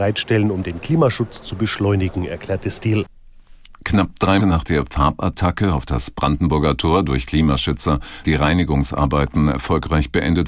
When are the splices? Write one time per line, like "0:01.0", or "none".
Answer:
0:04.4
0:08.2